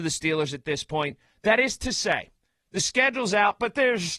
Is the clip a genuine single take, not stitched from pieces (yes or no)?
yes